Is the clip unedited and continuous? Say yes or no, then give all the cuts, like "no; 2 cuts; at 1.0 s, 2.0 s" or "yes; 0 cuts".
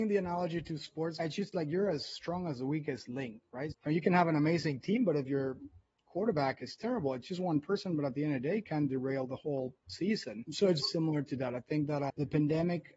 no; 1 cut; at 10.8 s